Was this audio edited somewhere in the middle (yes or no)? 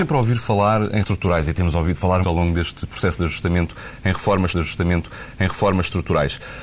yes